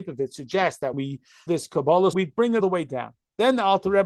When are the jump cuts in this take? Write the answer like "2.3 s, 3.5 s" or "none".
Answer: 0.9 s, 1.5 s, 2.1 s, 2.6 s